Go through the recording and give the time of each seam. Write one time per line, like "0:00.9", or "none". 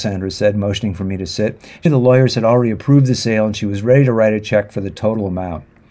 0:01.9